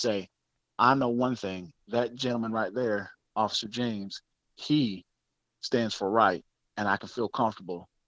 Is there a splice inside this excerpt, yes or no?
no